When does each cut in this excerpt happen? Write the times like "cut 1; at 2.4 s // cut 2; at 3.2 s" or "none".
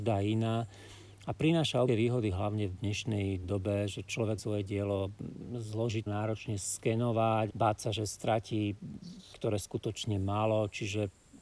cut 1; at 1.9 s // cut 2; at 3.4 s // cut 3; at 4.4 s // cut 4; at 6.1 s // cut 5; at 7.5 s // cut 6; at 9.3 s

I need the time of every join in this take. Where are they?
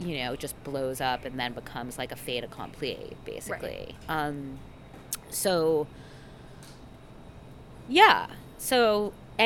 none

